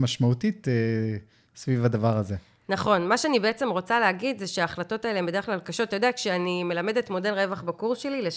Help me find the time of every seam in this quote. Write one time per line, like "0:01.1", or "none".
none